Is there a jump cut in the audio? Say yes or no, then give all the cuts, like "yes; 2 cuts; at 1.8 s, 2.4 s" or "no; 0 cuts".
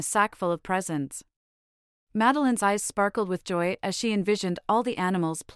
no; 0 cuts